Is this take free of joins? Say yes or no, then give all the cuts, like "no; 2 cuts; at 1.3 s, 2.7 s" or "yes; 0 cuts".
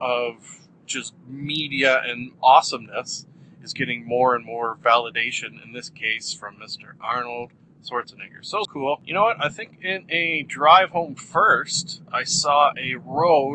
no; 1 cut; at 8.6 s